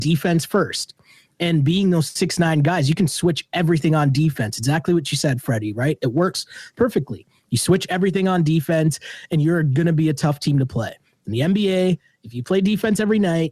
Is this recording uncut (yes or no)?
yes